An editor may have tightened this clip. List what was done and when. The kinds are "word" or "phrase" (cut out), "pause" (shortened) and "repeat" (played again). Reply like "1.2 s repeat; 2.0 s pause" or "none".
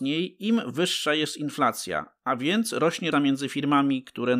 3.1 s word

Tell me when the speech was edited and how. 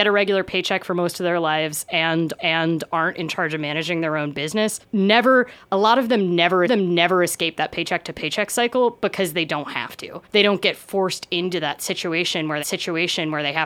2.4 s repeat; 4.8 s pause; 6.6 s repeat; 10.2 s pause; 12.6 s repeat

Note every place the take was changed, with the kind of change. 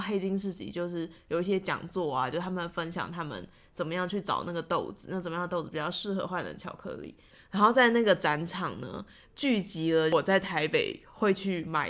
none

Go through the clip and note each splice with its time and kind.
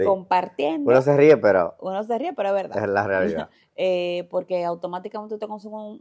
3.5 s pause

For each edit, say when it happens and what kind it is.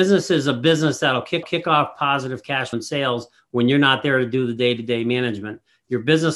1.4 s repeat; 2.7 s phrase

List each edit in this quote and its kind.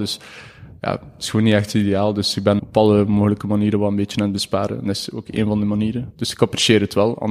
2.6 s word

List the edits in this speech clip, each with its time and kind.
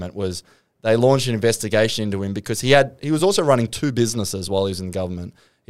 none

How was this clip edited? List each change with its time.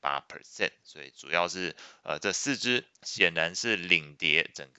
2.9 s pause

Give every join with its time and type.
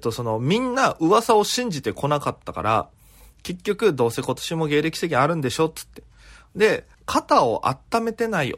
6.9 s pause

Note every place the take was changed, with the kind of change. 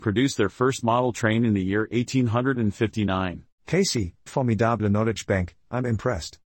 4.3 s word

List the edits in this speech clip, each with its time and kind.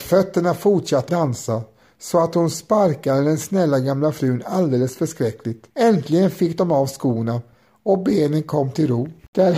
1.1 s word; 5.7 s pause

